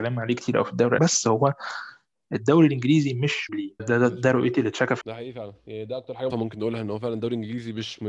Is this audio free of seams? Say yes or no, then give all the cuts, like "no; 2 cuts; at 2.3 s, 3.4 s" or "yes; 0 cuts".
no; 5 cuts; at 1.0 s, 3.5 s, 3.8 s, 5.0 s, 6.3 s